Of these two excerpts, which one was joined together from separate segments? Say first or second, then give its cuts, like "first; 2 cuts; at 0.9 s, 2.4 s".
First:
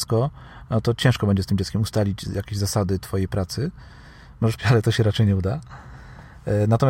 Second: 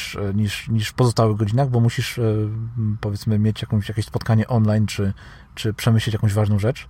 first; 1 cut; at 4.6 s